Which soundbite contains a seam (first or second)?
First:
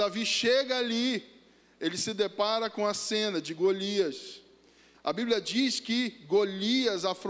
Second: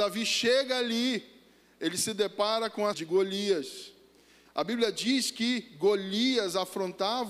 second